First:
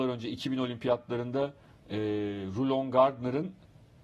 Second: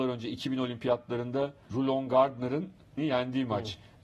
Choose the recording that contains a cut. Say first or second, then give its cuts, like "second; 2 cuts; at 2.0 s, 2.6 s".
second; 2 cuts; at 1.7 s, 3.0 s